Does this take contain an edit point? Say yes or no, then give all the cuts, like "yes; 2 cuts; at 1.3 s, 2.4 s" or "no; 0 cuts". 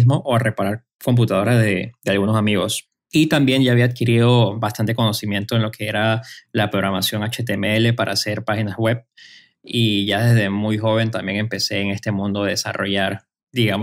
no; 0 cuts